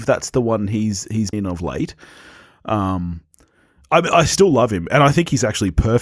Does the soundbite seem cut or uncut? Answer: cut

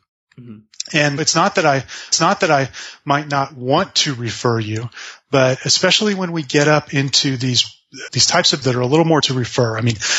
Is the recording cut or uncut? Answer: cut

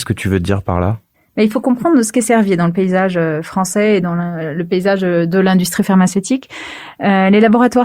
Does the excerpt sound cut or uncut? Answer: uncut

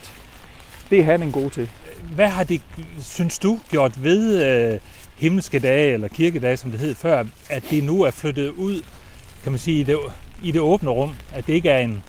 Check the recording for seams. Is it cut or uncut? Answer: uncut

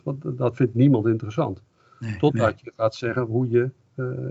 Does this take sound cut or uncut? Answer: uncut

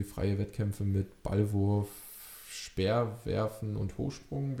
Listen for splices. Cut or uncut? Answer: uncut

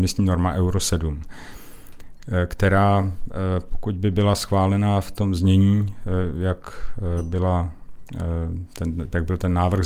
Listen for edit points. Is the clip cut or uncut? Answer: uncut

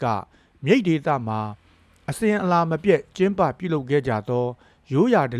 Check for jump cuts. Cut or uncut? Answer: uncut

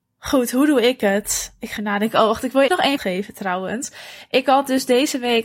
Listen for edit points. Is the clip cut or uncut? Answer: cut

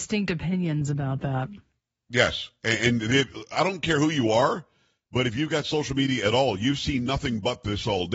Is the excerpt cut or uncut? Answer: uncut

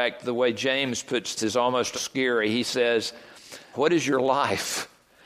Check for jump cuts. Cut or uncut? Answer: cut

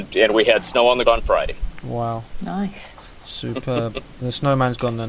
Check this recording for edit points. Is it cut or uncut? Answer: cut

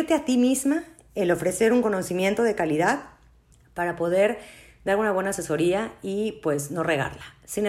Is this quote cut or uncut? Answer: uncut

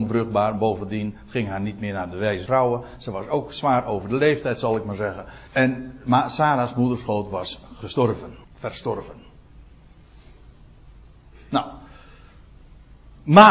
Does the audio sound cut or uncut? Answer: cut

